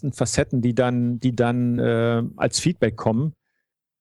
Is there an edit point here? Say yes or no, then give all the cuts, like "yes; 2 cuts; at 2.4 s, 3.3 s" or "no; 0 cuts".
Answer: no; 0 cuts